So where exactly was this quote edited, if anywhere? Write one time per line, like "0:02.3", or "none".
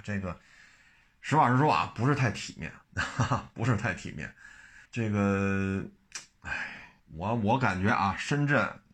0:02.8
0:04.9
0:07.0